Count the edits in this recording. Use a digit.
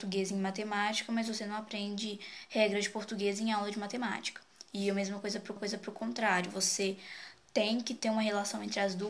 1